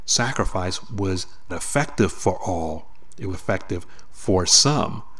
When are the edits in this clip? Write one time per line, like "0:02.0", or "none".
0:01.5
0:03.3